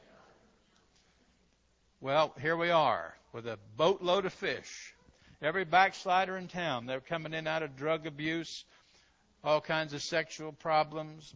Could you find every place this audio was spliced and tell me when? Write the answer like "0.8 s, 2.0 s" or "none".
none